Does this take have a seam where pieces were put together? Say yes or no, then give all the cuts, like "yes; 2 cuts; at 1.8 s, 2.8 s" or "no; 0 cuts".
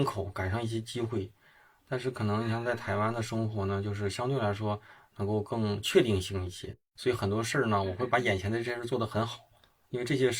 no; 0 cuts